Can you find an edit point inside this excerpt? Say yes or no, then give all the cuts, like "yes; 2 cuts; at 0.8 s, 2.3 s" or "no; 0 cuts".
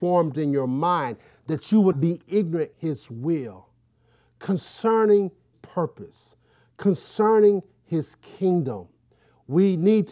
yes; 3 cuts; at 1.9 s, 2.7 s, 5.5 s